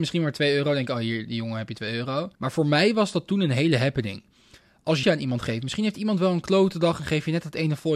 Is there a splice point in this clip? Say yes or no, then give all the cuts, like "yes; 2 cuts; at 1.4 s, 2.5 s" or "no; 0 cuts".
yes; 2 cuts; at 2.3 s, 5.0 s